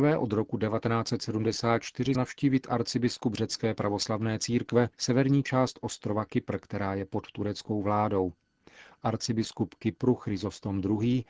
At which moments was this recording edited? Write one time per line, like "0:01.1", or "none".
0:02.1
0:04.9